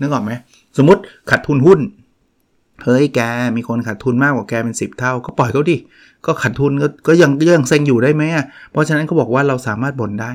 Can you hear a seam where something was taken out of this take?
no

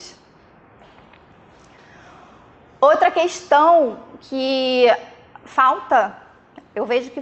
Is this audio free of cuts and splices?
yes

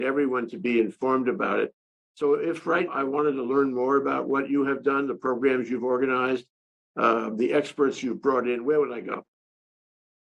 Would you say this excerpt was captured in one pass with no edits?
no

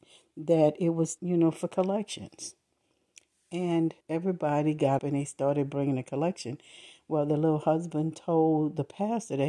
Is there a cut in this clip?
yes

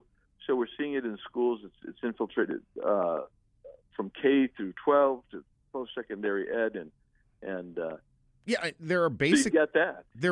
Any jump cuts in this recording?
no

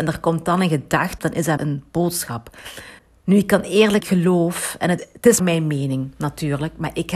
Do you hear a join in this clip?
yes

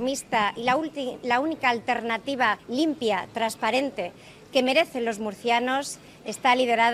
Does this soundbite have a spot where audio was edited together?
yes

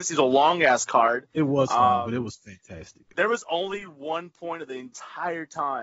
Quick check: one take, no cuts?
yes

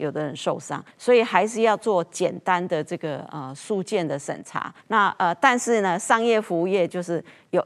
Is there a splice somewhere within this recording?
yes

